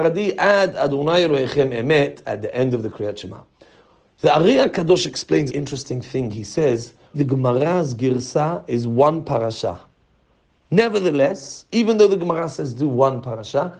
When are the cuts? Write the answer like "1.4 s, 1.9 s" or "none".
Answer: 5.5 s, 7.1 s